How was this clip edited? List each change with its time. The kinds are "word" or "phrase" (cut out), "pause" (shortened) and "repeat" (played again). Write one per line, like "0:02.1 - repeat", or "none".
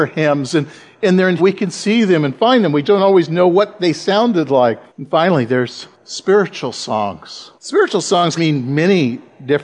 0:01.4 - word
0:02.8 - word
0:04.9 - pause
0:05.9 - pause
0:07.6 - pause
0:08.4 - word